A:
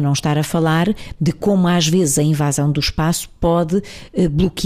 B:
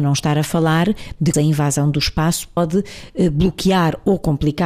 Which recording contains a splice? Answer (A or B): B